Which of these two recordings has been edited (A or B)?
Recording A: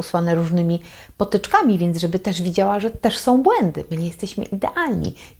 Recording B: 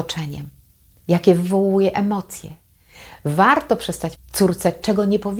B